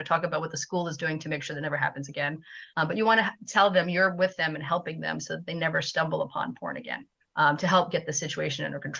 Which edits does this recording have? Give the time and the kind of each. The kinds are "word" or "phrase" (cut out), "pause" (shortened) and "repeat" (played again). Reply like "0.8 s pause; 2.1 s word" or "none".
2.7 s pause; 7.2 s pause